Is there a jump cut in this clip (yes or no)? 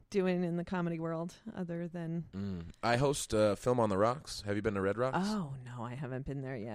no